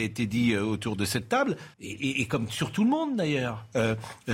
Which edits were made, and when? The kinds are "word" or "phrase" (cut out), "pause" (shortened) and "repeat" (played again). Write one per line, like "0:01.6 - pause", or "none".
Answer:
0:01.7 - pause